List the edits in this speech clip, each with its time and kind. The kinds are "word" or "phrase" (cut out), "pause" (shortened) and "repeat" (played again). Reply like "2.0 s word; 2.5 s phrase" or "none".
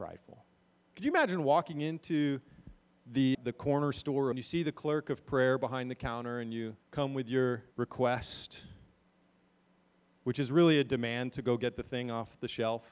3.3 s word; 4.3 s phrase; 6.8 s pause; 7.7 s pause